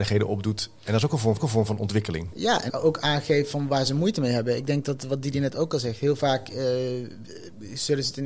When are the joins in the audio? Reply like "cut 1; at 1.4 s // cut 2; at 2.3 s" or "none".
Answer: cut 1; at 1.4 s // cut 2; at 2.7 s